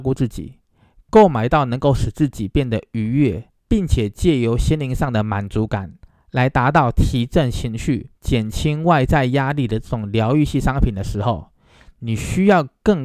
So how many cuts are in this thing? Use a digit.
3